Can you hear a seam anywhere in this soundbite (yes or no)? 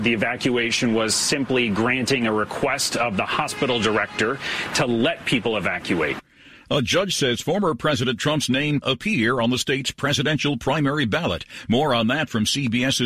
yes